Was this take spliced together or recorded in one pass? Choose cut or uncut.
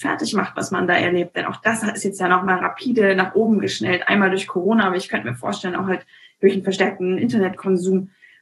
uncut